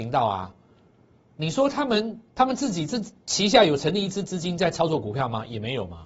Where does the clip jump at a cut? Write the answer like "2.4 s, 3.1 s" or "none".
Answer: 2.3 s